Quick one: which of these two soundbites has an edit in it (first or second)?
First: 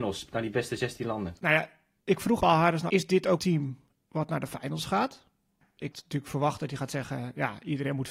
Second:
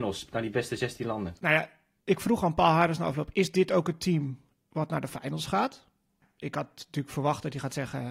first